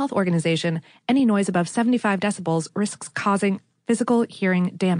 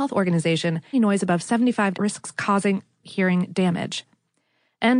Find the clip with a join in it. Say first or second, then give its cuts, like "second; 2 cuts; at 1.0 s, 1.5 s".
second; 3 cuts; at 0.9 s, 1.9 s, 3.0 s